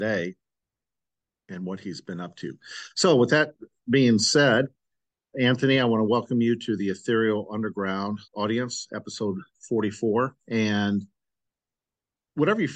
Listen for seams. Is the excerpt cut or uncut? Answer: cut